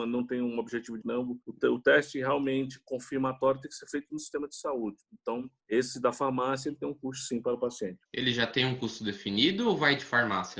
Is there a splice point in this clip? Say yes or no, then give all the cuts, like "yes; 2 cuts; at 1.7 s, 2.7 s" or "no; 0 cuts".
yes; 4 cuts; at 1.0 s, 1.4 s, 5.6 s, 8.1 s